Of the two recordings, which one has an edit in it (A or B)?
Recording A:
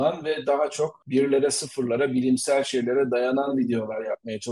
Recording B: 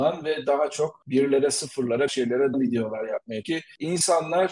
B